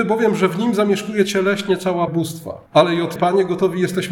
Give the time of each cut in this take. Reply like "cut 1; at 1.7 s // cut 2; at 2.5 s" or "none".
cut 1; at 2.1 s // cut 2; at 2.7 s // cut 3; at 3.2 s